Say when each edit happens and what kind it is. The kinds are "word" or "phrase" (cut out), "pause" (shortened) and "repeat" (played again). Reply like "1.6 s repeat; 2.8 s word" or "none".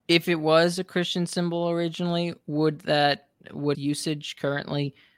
3.7 s word

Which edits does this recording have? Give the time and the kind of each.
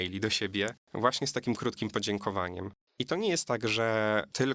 none

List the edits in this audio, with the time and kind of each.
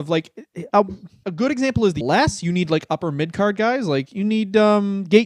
1.2 s word; 2.0 s phrase

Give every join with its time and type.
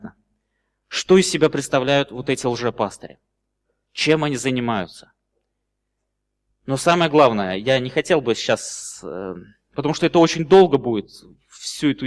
none

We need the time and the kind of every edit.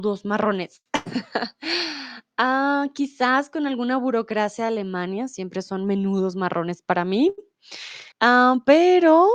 8.1 s pause

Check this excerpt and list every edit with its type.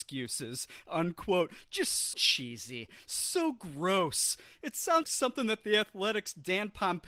2.1 s word; 5.0 s word

